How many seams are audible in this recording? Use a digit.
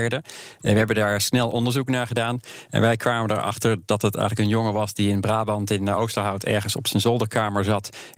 0